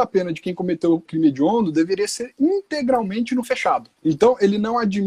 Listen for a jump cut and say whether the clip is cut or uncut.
cut